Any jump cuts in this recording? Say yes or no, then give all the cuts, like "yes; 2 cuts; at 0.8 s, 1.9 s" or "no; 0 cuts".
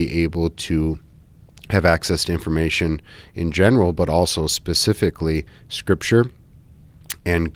no; 0 cuts